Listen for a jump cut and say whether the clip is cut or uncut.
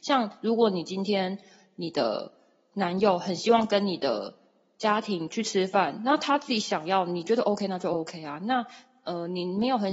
uncut